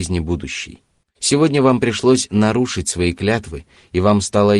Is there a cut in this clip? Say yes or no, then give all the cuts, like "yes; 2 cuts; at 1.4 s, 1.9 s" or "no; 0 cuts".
yes; 1 cut; at 1.0 s